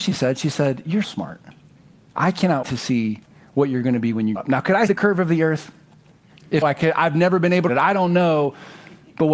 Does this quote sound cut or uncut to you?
cut